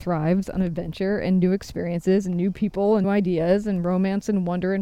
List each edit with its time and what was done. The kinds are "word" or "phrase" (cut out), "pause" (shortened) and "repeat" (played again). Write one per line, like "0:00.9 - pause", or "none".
0:03.0 - word